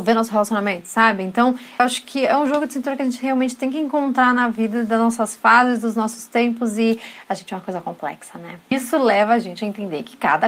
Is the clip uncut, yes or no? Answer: yes